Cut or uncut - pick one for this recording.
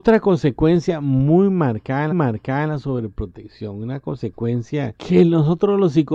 cut